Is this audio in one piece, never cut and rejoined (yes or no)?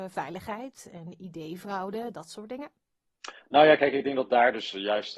yes